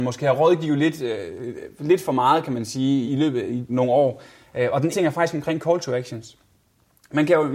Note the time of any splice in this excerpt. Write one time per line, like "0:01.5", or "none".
0:03.1
0:03.7
0:04.9